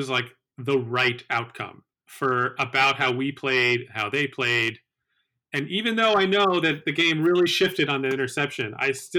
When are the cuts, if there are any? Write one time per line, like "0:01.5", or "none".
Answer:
0:01.9